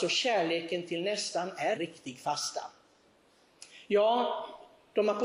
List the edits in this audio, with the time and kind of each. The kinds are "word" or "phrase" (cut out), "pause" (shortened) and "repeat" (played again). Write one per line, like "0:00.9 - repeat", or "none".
0:01.8 - word